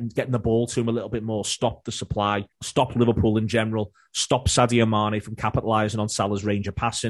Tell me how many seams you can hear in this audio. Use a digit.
1